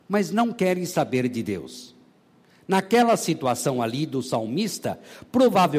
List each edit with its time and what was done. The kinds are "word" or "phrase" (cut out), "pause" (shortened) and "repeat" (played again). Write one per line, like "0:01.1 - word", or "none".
none

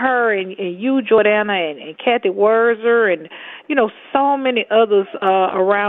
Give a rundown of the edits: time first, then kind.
none

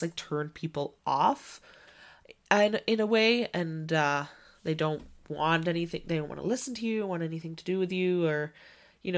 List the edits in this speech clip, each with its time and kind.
none

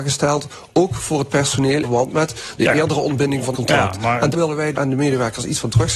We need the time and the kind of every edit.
0:01.8 - word
0:03.5 - word
0:04.3 - word
0:04.7 - word

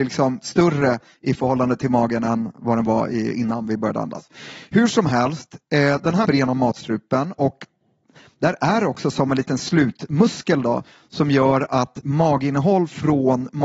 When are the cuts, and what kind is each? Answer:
0:06.3 - phrase

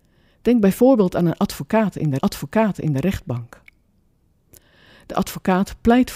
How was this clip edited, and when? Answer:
0:02.2 - repeat

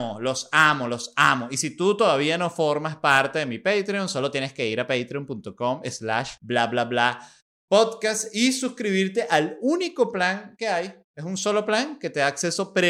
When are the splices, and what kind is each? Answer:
0:06.4 - pause

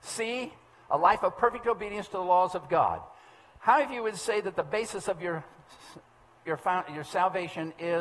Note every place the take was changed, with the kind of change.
none

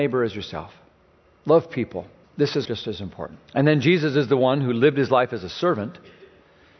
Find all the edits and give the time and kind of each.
0:02.2 - pause
0:02.6 - word
0:03.4 - pause

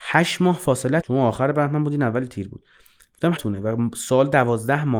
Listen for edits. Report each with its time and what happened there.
0:01.0 - word
0:03.4 - phrase

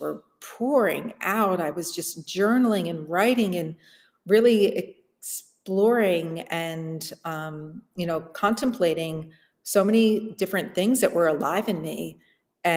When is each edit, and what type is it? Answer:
none

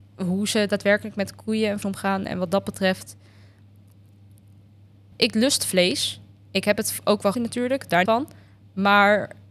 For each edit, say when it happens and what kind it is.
0:01.8 - word
0:05.1 - word
0:07.3 - word
0:08.1 - word

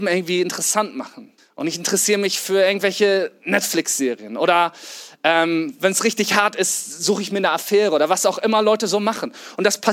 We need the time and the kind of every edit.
0:01.4 - pause

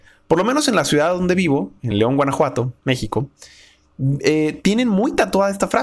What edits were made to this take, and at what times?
none

